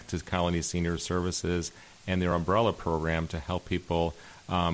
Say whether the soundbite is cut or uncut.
uncut